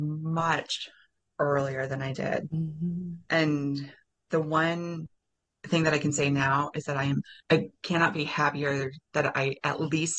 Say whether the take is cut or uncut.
cut